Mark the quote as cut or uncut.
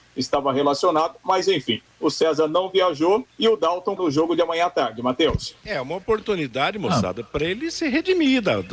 cut